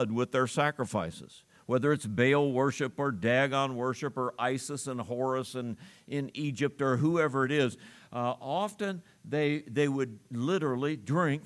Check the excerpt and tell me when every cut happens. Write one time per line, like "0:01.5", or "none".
none